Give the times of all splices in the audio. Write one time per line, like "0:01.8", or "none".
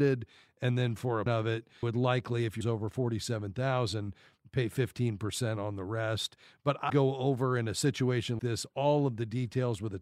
0:01.3
0:01.8
0:02.6
0:06.9
0:08.4

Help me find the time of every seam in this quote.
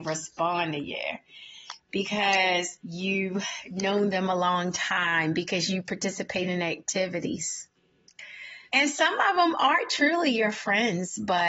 0:02.8
0:08.7

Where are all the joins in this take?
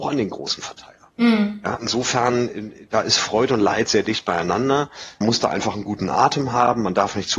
0:01.8
0:02.9
0:05.2

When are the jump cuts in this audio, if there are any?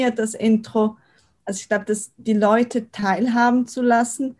none

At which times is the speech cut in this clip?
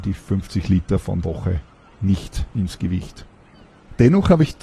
0:01.2
0:02.5

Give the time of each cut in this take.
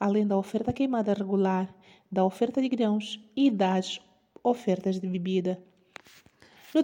none

